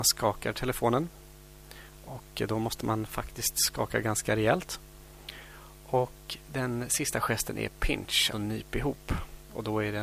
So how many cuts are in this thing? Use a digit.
1